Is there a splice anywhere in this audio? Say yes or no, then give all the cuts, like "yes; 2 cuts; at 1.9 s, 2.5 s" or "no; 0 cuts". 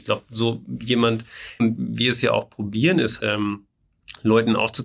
yes; 2 cuts; at 1.6 s, 3.2 s